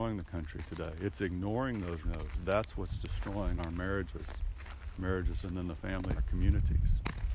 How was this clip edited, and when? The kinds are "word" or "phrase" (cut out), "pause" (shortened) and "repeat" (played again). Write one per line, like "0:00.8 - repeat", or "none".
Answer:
0:02.0 - word
0:03.6 - phrase
0:05.4 - word
0:06.2 - word